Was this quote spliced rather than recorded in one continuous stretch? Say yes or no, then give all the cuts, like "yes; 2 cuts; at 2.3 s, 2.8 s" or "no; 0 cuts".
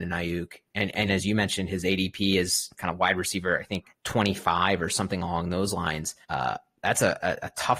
yes; 4 cuts; at 1.1 s, 2.7 s, 3.9 s, 6.2 s